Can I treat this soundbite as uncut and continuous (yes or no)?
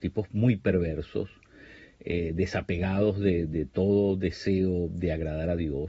no